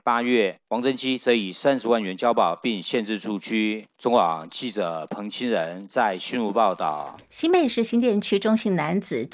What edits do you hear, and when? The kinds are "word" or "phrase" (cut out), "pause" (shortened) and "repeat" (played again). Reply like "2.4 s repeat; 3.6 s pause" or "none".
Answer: 3.9 s pause; 7.2 s pause